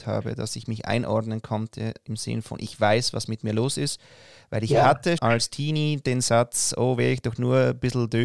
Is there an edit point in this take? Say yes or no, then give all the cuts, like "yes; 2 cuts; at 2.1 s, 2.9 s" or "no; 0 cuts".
yes; 1 cut; at 5.2 s